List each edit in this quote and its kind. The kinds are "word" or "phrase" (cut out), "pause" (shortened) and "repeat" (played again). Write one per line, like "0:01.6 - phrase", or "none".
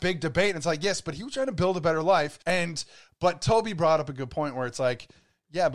0:02.4 - pause